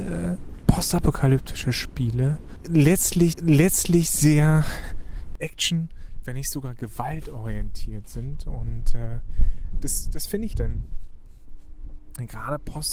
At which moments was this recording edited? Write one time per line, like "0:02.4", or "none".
0:03.3
0:10.5

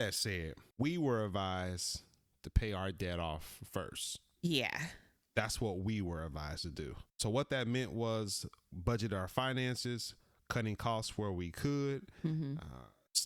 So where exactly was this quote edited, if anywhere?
0:07.1

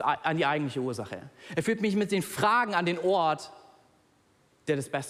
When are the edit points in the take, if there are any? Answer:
none

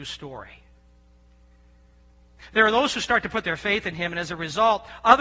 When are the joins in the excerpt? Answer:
none

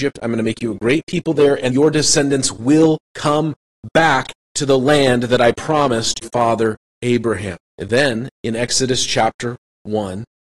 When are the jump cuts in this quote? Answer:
0:01.7
0:03.0
0:06.2
0:07.7

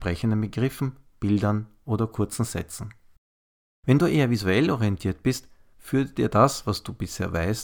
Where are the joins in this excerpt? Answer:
none

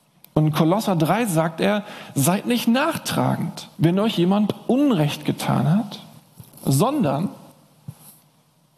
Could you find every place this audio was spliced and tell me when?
0:03.7

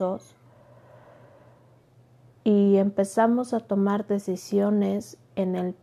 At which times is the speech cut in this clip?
none

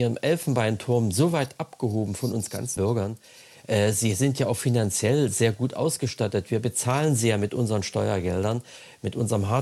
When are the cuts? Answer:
0:02.8

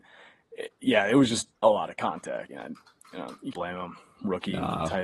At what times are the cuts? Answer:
0:01.6
0:02.5
0:03.5

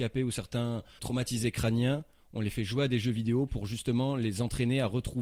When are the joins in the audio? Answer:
0:01.0

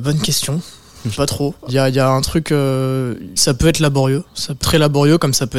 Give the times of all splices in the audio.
0:01.1
0:01.7
0:03.4
0:04.3
0:04.6

